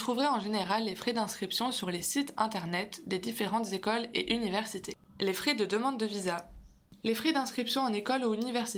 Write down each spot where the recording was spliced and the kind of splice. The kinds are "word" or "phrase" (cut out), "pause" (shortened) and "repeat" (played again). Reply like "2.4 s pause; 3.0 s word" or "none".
none